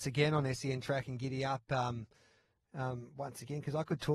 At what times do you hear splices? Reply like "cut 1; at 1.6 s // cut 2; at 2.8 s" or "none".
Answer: none